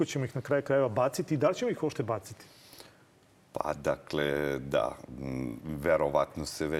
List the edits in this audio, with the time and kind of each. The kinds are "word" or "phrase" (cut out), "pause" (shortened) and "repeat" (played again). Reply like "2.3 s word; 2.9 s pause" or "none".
none

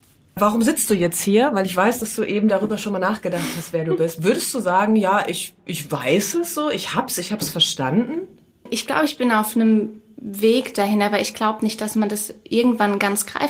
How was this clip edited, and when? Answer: none

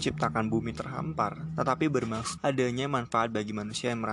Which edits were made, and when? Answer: 2.4 s word

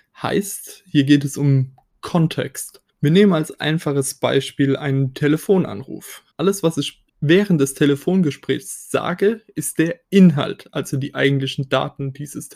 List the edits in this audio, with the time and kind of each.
2.9 s pause; 6.3 s pause; 7.1 s pause

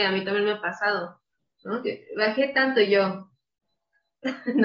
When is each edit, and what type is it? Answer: none

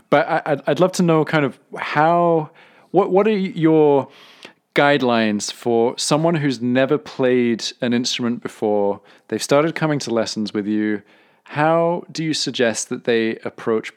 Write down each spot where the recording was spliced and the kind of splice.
none

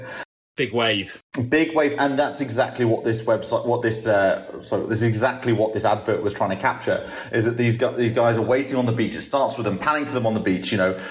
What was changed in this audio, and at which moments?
none

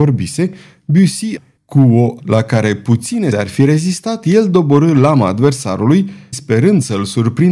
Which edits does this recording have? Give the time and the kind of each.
1.4 s word; 2.2 s word; 3.3 s word; 6.3 s word

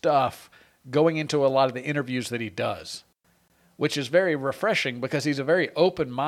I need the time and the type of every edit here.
none

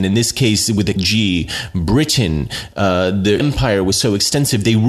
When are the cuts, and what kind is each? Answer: 1.0 s word; 3.4 s word

